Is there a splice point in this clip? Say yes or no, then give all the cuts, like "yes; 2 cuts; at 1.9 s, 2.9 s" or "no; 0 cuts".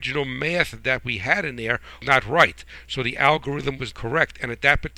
yes; 2 cuts; at 2.0 s, 3.9 s